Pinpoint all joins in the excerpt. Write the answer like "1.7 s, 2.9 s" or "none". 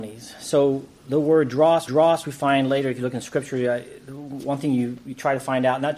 1.9 s